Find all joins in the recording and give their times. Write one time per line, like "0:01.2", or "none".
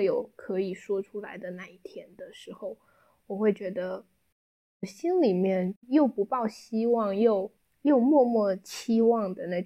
0:07.6